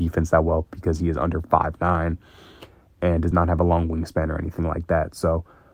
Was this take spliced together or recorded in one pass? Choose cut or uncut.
uncut